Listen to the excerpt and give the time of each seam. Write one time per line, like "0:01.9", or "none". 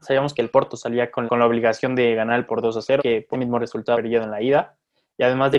0:01.3
0:02.5
0:03.0
0:03.3
0:03.9